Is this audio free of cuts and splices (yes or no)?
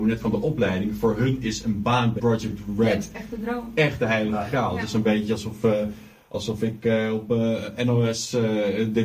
no